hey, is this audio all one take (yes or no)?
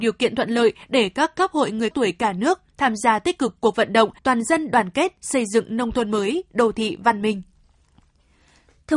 no